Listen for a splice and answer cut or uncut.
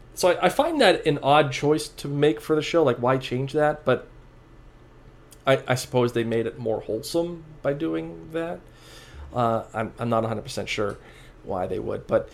uncut